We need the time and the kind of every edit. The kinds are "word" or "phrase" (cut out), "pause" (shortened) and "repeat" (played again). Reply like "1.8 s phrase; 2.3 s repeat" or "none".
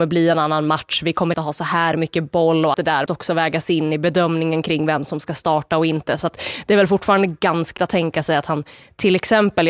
1.3 s word; 2.7 s word; 3.1 s word; 7.8 s word